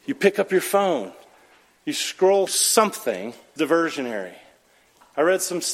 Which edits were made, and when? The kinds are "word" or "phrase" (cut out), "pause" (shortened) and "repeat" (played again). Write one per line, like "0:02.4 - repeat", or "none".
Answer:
0:02.5 - word
0:03.6 - word